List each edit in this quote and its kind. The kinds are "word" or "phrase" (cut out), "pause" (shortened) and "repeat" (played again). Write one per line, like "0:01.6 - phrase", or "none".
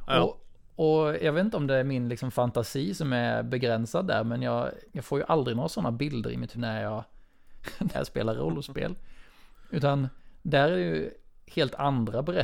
0:04.9 - word
0:06.5 - word
0:07.9 - word